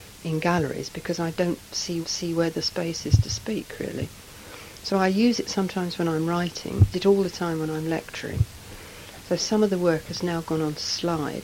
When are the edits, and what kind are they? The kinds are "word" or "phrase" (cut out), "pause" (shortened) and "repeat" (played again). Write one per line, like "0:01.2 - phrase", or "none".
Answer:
0:02.0 - repeat
0:06.9 - phrase